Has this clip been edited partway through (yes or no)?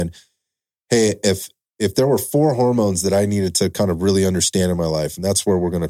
no